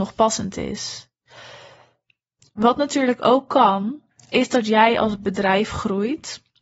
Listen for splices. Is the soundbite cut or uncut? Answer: uncut